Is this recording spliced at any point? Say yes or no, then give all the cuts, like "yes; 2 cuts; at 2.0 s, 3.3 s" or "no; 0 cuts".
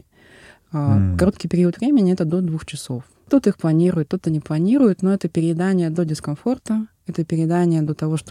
no; 0 cuts